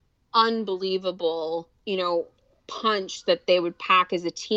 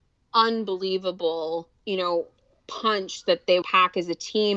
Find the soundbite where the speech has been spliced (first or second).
second